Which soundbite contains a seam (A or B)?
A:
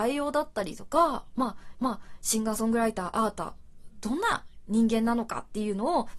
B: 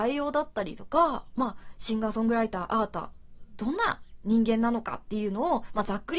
A